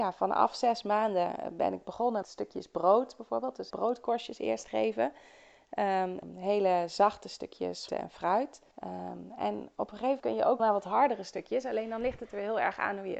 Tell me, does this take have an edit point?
yes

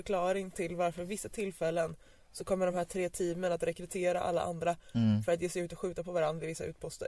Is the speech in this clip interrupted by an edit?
no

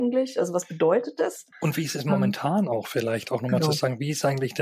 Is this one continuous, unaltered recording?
no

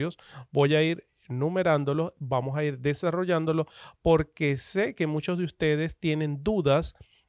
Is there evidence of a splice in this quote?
no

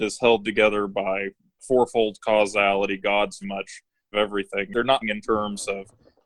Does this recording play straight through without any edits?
no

